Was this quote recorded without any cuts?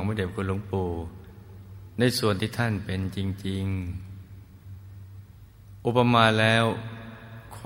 yes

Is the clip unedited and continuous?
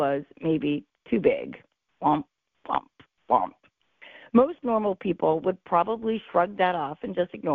yes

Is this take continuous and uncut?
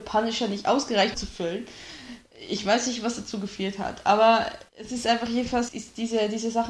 no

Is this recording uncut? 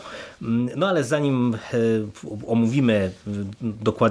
yes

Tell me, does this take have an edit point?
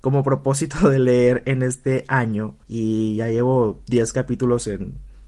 yes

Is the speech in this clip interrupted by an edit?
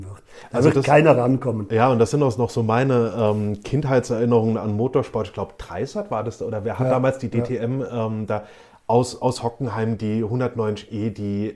no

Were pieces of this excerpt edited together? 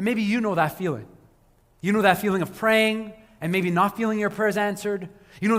no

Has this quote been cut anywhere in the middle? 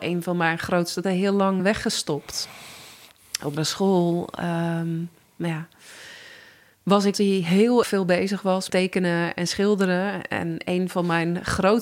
yes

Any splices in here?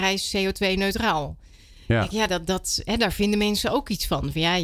no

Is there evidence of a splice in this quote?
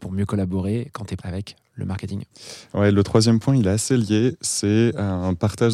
yes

